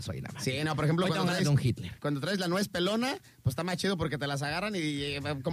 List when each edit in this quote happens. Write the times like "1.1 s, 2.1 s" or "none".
none